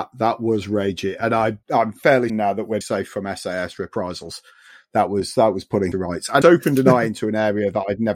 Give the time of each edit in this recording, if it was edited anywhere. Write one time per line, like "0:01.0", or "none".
0:01.6
0:02.3
0:02.8
0:05.9
0:06.4